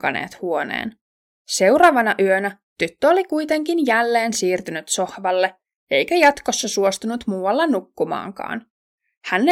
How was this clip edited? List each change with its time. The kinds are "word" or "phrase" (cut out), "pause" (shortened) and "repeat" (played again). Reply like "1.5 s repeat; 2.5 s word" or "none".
none